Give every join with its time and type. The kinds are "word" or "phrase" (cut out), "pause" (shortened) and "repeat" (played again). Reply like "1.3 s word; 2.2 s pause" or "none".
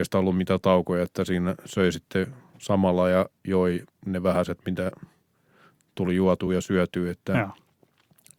none

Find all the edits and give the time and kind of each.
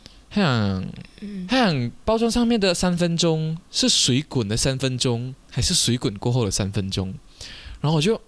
3.6 s pause; 5.4 s pause

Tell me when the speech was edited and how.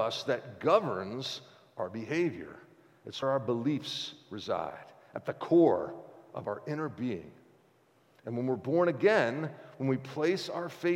3.2 s word

